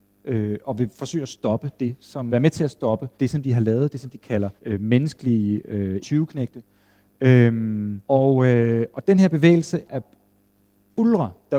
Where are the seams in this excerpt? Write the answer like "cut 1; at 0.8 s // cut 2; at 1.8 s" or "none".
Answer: cut 1; at 2.3 s // cut 2; at 3.1 s // cut 3; at 4.6 s // cut 4; at 6.0 s // cut 5; at 8.0 s // cut 6; at 9.9 s